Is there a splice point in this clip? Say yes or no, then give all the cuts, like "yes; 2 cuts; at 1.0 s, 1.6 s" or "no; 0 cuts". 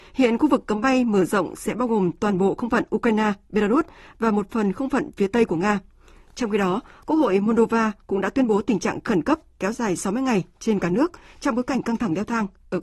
no; 0 cuts